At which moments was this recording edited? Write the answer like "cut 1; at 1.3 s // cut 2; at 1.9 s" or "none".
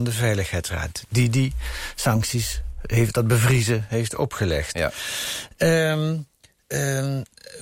cut 1; at 3.1 s